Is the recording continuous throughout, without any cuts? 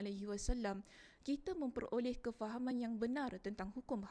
yes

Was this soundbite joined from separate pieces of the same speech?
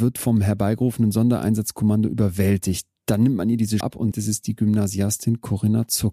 yes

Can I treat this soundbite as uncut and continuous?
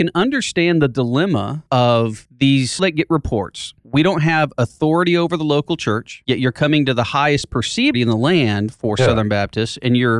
no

